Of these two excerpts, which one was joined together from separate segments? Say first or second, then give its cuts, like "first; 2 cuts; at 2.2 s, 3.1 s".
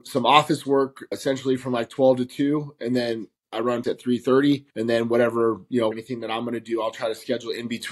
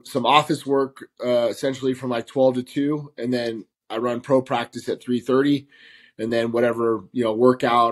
first; 4 cuts; at 1.1 s, 3.8 s, 4.7 s, 5.9 s